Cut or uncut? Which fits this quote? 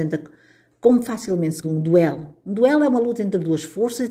cut